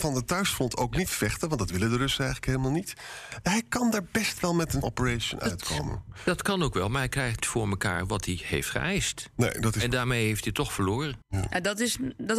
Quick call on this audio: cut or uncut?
cut